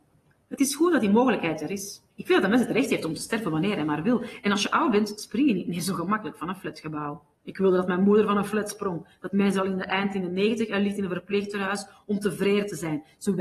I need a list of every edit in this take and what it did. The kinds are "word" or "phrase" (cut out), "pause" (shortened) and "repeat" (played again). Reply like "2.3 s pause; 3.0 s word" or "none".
2.1 s pause; 7.3 s pause